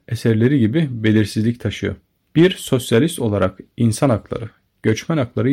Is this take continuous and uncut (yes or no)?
yes